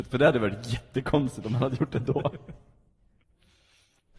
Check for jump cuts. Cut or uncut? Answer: uncut